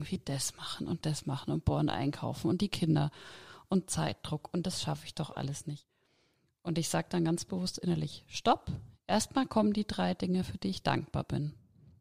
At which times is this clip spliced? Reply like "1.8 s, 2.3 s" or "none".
none

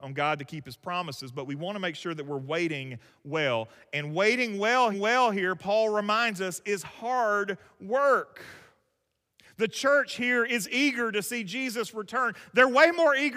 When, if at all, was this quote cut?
4.9 s

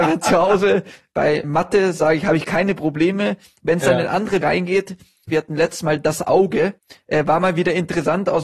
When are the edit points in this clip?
1.4 s, 4.4 s

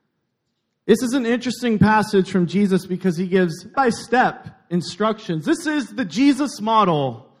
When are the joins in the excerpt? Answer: 3.7 s

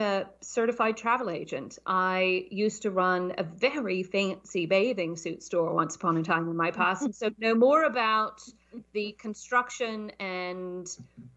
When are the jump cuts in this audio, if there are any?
none

